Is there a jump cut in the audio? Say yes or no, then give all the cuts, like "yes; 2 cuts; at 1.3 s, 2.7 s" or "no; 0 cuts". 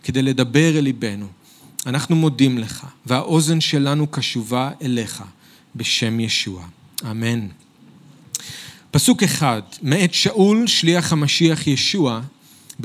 no; 0 cuts